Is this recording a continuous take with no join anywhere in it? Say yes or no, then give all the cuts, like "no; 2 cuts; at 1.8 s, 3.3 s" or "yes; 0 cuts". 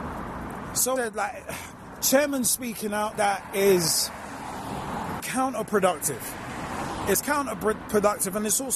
no; 3 cuts; at 1.0 s, 3.1 s, 5.2 s